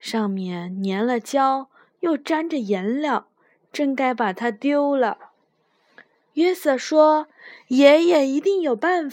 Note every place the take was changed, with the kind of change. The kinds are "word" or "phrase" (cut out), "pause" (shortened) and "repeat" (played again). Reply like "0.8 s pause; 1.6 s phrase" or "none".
none

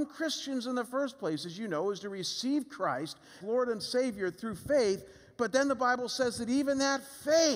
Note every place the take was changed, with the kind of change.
3.4 s word

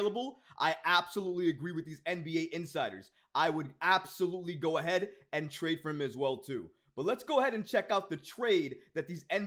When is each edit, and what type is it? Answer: none

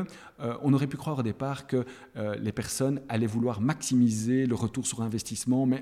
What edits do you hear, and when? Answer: none

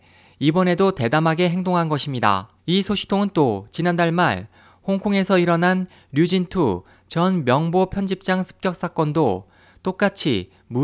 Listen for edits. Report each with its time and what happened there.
2.6 s pause

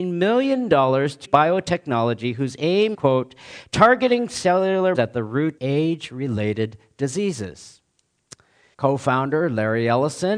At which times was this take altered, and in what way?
1.2 s word; 2.9 s word; 4.9 s word; 5.6 s word; 8.7 s word

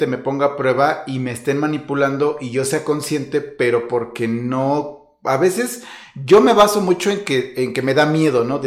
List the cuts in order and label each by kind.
none

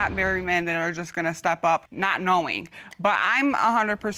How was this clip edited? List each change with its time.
none

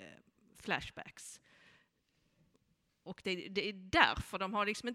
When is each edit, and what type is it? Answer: none

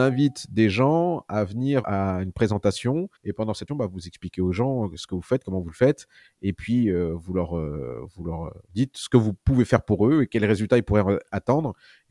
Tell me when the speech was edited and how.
1.8 s word; 3.2 s pause; 3.7 s word; 8.7 s pause

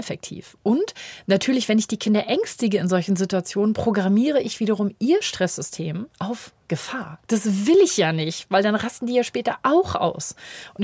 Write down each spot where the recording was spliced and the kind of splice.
6.1 s pause; 7.2 s pause

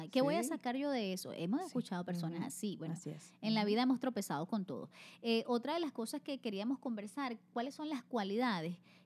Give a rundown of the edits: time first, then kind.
none

